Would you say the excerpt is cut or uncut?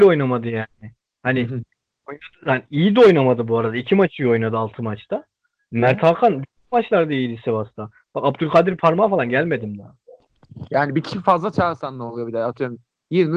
uncut